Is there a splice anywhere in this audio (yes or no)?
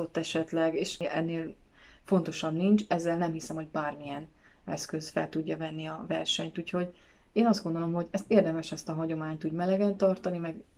no